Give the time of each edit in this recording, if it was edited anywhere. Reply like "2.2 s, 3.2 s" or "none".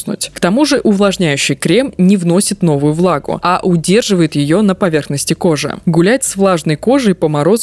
none